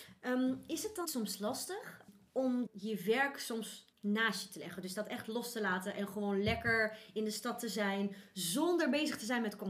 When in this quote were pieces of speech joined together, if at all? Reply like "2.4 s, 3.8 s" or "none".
1.0 s, 2.7 s, 3.9 s